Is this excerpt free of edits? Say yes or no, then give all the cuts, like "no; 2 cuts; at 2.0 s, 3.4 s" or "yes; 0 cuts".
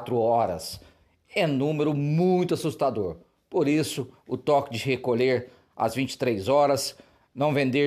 yes; 0 cuts